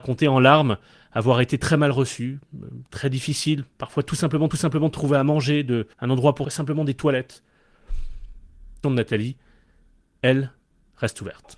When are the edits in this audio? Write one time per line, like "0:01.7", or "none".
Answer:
0:02.9
0:03.7
0:04.5
0:05.9
0:06.4
0:08.8